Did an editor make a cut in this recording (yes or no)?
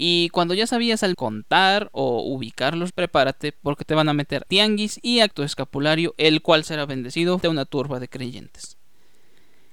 yes